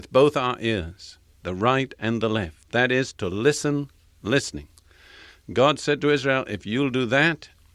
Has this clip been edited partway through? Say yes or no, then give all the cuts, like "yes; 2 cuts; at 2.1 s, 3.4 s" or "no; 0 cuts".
no; 0 cuts